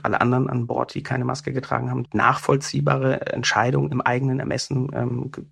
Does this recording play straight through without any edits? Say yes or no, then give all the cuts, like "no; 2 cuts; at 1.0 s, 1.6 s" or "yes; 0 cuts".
no; 1 cut; at 2.1 s